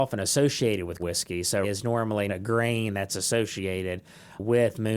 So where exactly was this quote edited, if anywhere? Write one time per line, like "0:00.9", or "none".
0:01.0
0:01.6
0:02.3